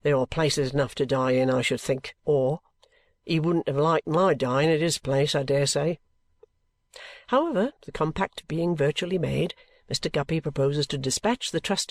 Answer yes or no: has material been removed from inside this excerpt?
yes